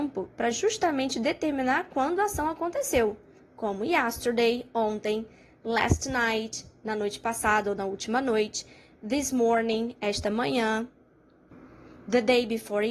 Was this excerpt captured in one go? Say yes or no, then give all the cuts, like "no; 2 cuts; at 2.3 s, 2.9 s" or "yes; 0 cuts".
yes; 0 cuts